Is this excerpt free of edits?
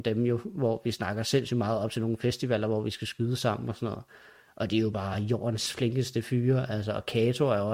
yes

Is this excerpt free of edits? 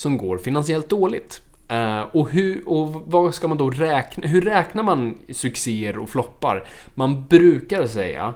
yes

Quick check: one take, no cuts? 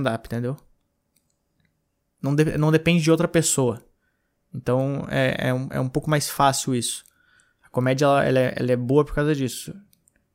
yes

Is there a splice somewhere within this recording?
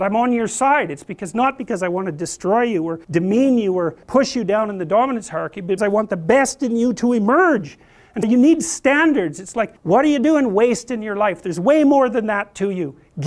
yes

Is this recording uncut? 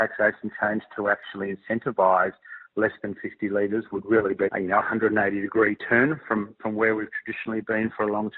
no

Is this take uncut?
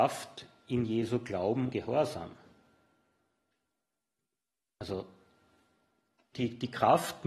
no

